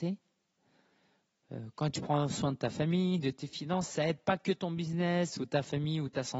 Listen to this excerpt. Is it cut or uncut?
uncut